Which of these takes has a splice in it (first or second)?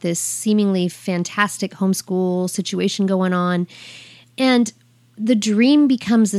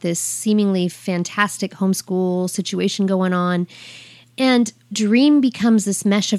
second